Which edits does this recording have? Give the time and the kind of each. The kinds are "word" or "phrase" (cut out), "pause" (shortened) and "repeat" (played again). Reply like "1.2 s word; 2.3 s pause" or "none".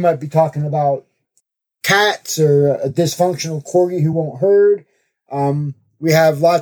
none